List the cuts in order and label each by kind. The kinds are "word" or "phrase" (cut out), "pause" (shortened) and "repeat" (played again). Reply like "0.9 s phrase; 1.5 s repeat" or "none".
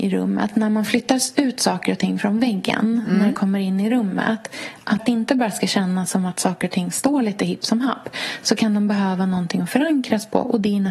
5.0 s word